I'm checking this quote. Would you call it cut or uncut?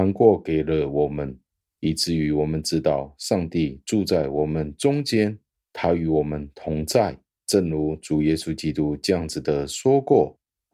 uncut